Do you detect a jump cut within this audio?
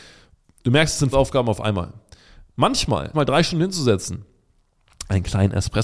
yes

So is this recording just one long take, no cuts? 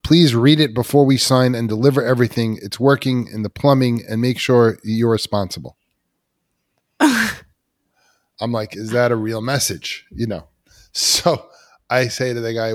yes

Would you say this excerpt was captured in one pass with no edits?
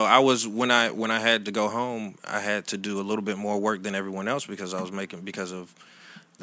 yes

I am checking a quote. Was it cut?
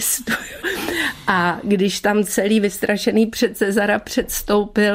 no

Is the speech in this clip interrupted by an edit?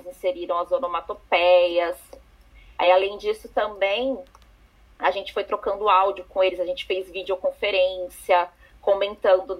no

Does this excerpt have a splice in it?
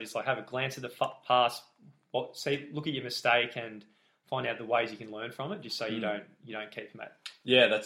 no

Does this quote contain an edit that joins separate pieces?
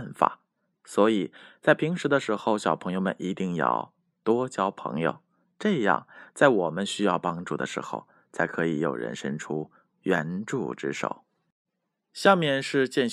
no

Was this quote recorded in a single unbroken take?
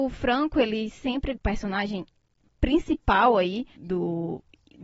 no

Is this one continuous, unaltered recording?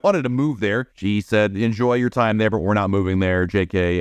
no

